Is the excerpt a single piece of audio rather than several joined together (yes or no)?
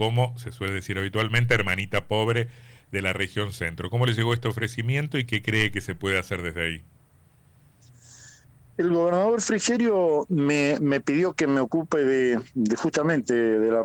yes